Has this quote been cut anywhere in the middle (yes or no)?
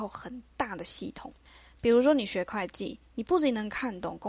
no